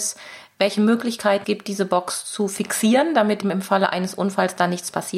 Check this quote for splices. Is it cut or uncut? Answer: cut